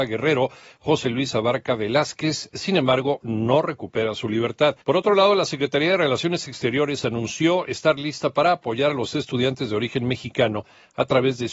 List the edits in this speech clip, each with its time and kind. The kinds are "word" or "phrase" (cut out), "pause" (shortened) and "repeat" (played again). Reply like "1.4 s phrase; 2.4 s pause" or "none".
4.8 s pause